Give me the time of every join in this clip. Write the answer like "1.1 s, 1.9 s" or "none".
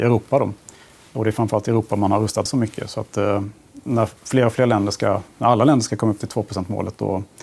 2.5 s, 4.2 s